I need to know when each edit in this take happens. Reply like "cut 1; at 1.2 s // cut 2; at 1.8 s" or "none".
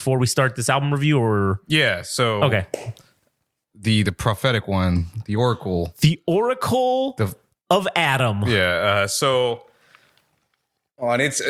none